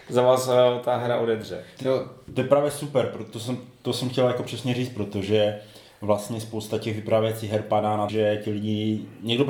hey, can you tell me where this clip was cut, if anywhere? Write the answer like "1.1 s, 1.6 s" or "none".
8.1 s

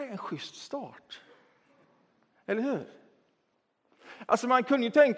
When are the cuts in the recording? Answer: none

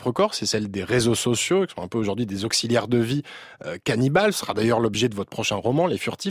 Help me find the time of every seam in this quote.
none

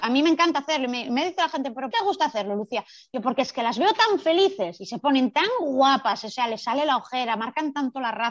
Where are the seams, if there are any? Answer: 1.9 s

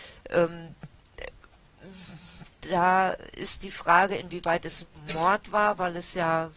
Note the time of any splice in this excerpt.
none

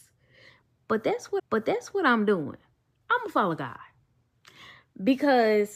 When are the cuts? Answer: 1.4 s

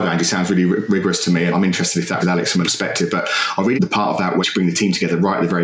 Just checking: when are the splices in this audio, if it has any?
1.5 s, 2.2 s, 2.6 s, 3.8 s, 4.4 s

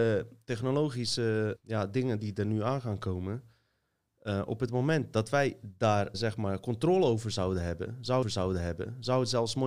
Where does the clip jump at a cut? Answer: 1.6 s, 6.1 s, 8.2 s

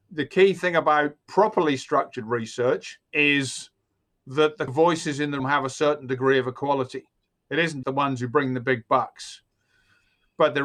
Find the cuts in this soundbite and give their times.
3.0 s, 5.4 s, 7.8 s

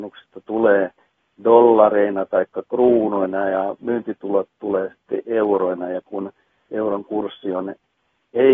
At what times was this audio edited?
none

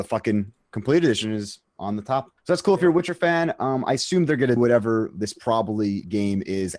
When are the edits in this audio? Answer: 2.4 s, 4.6 s

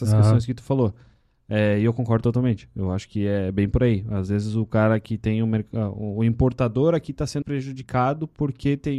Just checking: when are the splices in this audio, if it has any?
7.4 s

